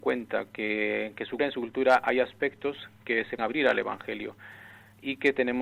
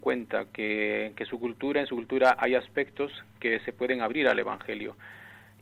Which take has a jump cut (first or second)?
first